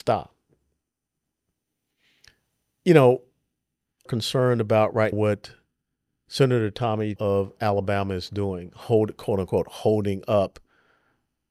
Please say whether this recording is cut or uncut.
cut